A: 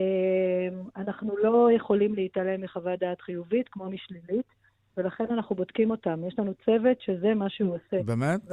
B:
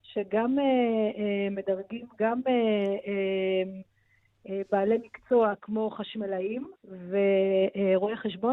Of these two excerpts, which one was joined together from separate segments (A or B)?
B